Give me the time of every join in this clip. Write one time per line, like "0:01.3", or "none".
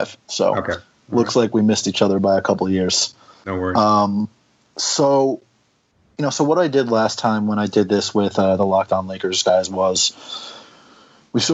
none